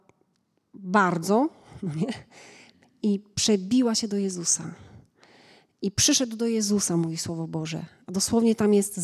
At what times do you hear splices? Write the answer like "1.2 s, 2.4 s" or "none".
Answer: none